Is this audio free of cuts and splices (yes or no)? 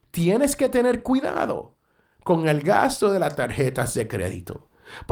yes